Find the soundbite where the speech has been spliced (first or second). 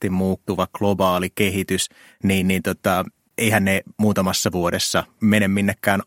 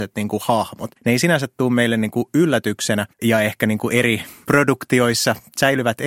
second